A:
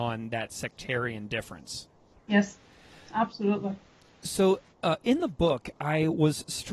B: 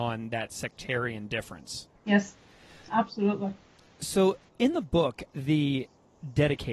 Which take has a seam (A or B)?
B